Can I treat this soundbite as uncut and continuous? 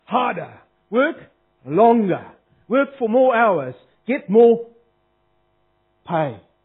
yes; 0 cuts

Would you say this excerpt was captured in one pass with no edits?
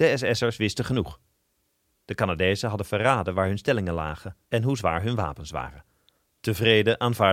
no; 2 cuts; at 4.4 s, 6.3 s

